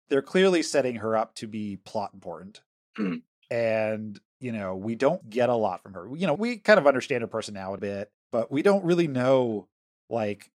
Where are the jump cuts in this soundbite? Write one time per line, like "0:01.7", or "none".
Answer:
0:04.3
0:05.2
0:06.3
0:07.8
0:08.2